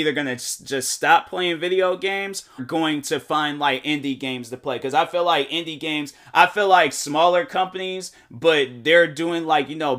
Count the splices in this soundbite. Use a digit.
1